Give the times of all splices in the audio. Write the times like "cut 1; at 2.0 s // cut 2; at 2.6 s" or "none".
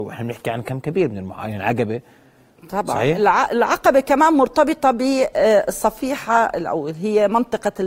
none